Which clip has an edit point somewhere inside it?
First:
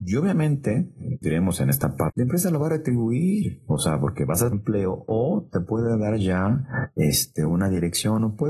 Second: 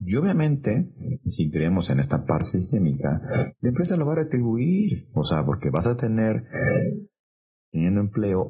first; 3 cuts; at 1.2 s, 2.1 s, 4.5 s

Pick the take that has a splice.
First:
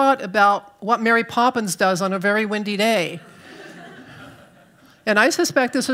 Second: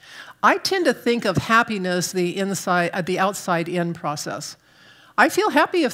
second; 1 cut; at 2.1 s

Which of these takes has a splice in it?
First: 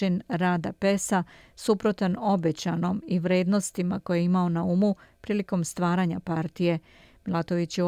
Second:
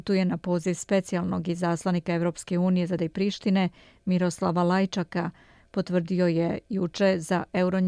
second; 1 cut; at 3.0 s

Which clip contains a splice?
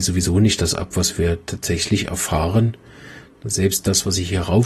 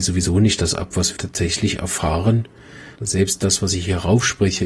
second; 2 cuts; at 1.2 s, 3.0 s

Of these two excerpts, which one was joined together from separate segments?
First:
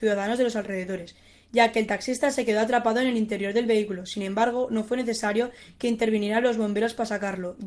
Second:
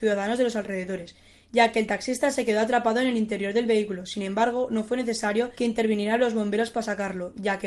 second; 1 cut; at 5.5 s

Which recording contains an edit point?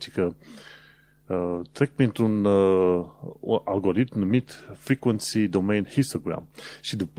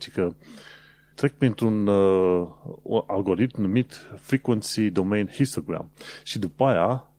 second; 1 cut; at 1.1 s

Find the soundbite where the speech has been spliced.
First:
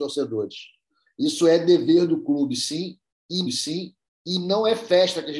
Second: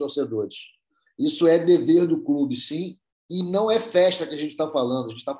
first; 1 cut; at 3.4 s

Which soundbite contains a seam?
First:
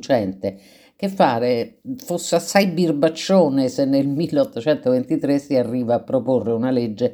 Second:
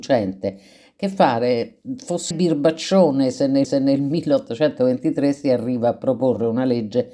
second; 2 cuts; at 2.3 s, 3.6 s

